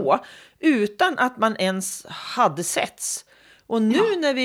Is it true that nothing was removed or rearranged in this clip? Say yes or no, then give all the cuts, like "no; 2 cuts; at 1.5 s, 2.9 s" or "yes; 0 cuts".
yes; 0 cuts